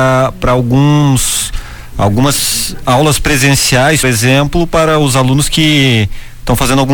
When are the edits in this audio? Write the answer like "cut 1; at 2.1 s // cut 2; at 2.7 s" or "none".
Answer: cut 1; at 4.0 s

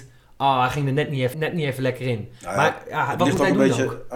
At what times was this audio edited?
cut 1; at 1.3 s

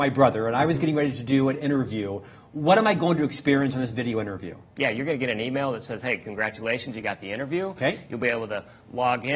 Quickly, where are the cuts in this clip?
none

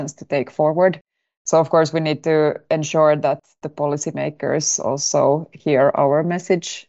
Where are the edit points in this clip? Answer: none

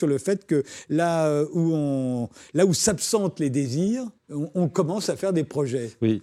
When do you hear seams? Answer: cut 1; at 4.2 s

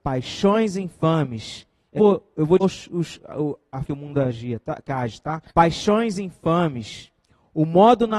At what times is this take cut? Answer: cut 1; at 2.0 s // cut 2; at 2.6 s // cut 3; at 3.8 s // cut 4; at 5.5 s

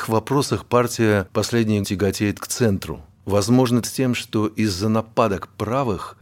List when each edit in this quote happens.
cut 1; at 1.8 s // cut 2; at 3.8 s

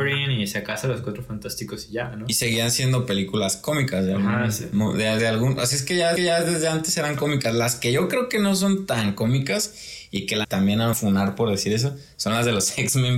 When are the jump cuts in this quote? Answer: cut 1; at 5.2 s // cut 2; at 6.2 s // cut 3; at 10.4 s // cut 4; at 10.9 s

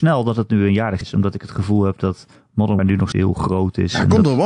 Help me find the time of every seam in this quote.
cut 1; at 1.0 s // cut 2; at 2.8 s // cut 3; at 3.1 s

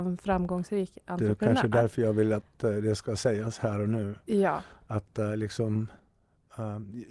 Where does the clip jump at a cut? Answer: none

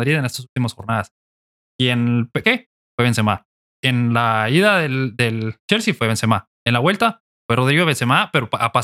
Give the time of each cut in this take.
cut 1; at 2.4 s

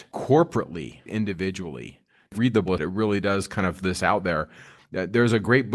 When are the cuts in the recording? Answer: cut 1; at 1.1 s // cut 2; at 2.3 s // cut 3; at 2.7 s // cut 4; at 3.8 s

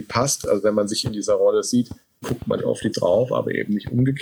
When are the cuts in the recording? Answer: cut 1; at 1.0 s // cut 2; at 2.2 s // cut 3; at 2.6 s // cut 4; at 2.9 s

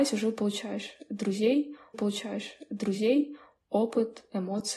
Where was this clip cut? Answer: cut 1; at 1.9 s

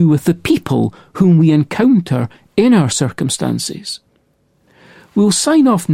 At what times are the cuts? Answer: none

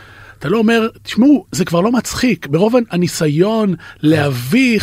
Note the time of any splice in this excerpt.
none

